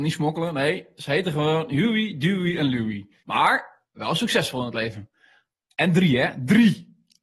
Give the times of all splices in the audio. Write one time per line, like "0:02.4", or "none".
0:03.2
0:05.5